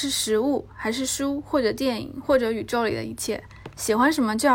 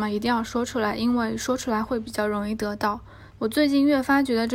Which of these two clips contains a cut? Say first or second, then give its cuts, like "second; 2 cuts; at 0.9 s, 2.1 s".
second; 1 cut; at 3.3 s